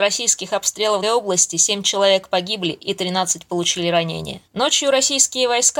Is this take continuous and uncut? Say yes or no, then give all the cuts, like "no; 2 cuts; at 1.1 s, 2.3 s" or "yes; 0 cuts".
no; 2 cuts; at 1.0 s, 4.5 s